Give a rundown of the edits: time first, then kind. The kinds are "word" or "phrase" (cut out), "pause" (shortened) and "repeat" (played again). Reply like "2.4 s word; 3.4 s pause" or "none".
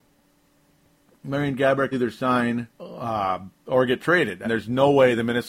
1.9 s word; 2.7 s pause; 4.4 s word